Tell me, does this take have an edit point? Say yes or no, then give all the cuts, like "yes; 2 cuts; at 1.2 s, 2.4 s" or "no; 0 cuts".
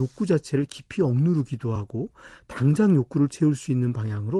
no; 0 cuts